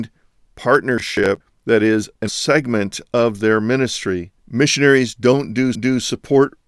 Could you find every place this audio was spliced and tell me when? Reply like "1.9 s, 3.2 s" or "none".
2.3 s, 4.4 s, 5.7 s